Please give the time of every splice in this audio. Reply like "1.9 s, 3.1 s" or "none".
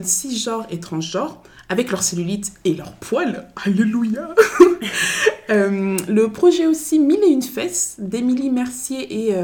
none